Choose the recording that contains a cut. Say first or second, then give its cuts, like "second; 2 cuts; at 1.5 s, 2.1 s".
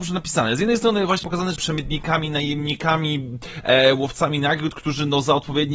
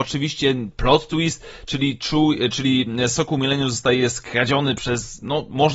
first; 2 cuts; at 1.2 s, 1.6 s